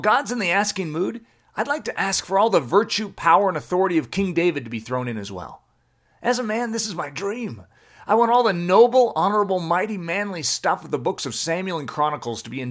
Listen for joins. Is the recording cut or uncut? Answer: uncut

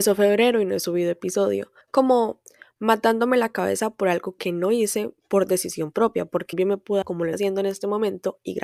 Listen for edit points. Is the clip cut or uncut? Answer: cut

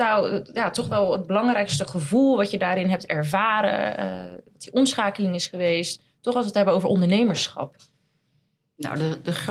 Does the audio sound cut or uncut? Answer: uncut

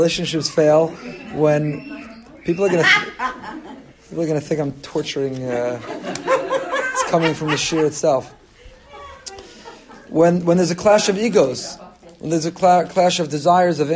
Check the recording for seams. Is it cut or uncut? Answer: cut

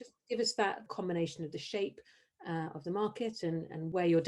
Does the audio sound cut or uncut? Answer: uncut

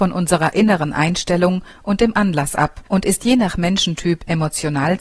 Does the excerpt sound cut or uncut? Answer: cut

